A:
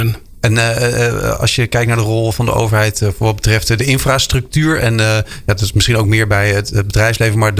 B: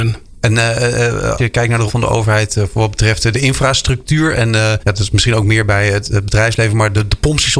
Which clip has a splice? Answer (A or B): B